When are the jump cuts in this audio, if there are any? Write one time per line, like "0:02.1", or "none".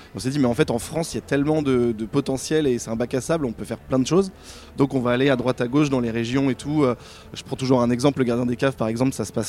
none